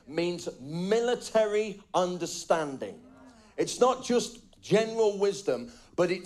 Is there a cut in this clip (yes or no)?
no